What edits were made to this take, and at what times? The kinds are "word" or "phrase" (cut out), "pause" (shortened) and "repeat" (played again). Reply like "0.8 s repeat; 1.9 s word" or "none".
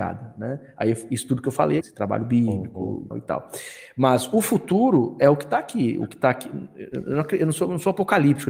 1.8 s word; 3.1 s word